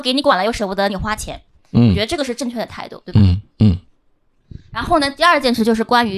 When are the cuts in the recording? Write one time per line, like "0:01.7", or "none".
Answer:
none